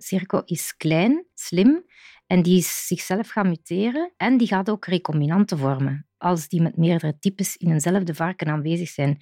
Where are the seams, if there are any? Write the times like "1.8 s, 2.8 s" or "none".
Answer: 1.3 s, 4.2 s